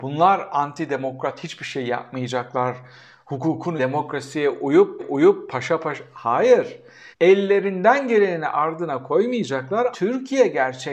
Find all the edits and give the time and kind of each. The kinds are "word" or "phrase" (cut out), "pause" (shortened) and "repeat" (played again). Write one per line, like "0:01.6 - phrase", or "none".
0:03.8 - word
0:05.0 - repeat
0:07.1 - pause
0:09.9 - word